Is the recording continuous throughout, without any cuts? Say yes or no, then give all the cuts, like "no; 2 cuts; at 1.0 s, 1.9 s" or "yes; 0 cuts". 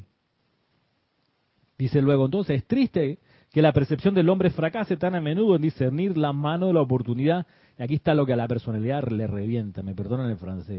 yes; 0 cuts